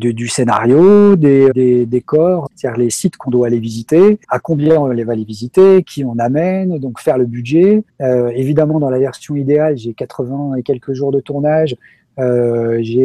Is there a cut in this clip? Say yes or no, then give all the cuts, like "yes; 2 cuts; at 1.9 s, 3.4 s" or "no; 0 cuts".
yes; 4 cuts; at 1.5 s, 2.5 s, 4.2 s, 7.9 s